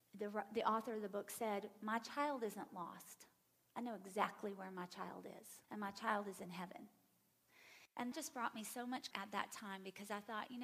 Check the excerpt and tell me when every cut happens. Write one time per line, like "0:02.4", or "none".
0:05.6
0:08.1
0:09.1